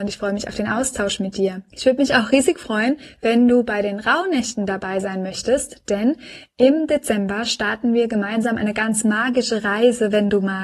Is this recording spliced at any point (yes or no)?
yes